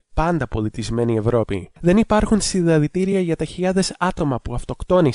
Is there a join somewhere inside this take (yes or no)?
no